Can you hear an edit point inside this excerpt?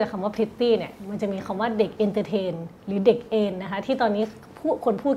yes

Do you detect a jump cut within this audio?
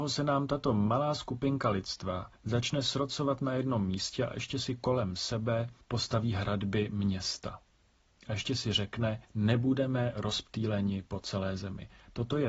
yes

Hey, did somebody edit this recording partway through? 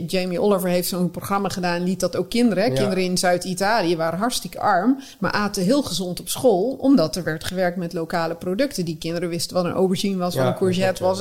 no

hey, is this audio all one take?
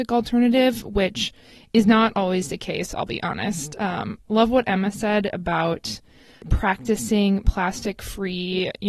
yes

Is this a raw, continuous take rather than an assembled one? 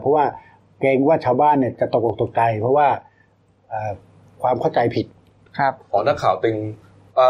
yes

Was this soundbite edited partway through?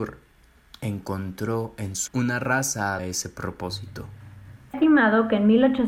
yes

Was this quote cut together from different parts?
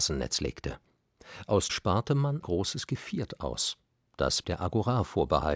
yes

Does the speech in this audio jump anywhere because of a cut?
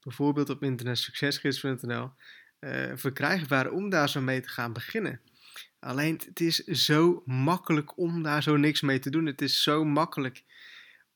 yes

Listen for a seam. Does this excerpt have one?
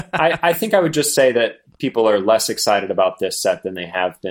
no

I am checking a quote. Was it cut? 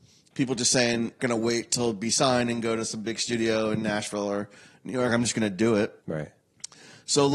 yes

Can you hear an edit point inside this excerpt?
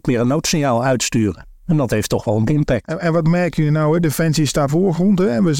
yes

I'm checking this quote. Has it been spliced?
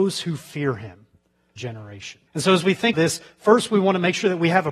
yes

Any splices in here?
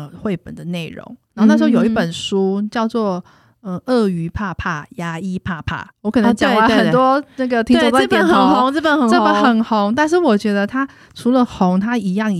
yes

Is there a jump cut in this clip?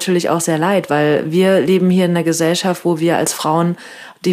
no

